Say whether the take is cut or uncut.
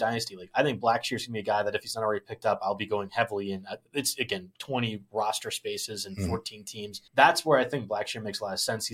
cut